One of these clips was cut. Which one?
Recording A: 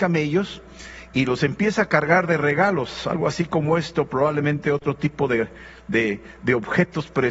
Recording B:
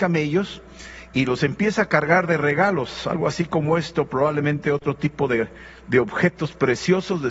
B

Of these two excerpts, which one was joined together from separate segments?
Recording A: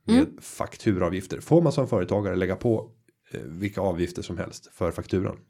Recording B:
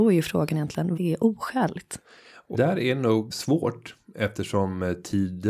B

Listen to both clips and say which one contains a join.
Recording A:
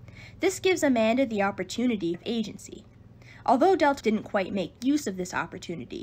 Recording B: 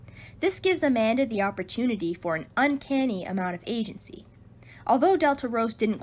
A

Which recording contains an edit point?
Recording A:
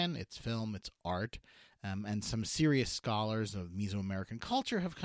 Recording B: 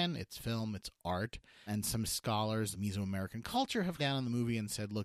B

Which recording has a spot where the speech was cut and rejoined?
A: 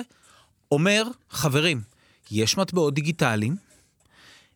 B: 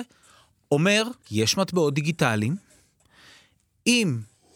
B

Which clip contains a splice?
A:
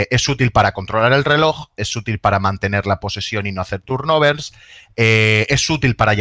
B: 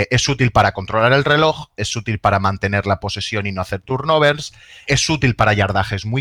B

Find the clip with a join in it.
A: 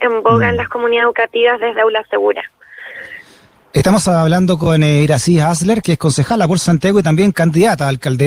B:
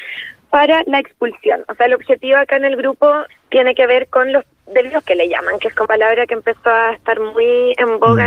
B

